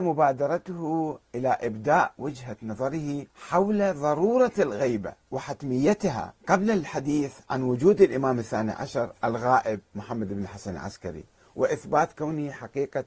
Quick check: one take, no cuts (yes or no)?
no